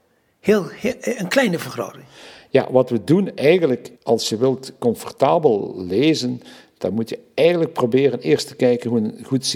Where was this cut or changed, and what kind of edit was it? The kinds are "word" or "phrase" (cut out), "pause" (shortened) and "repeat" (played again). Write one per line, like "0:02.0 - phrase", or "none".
0:04.0 - pause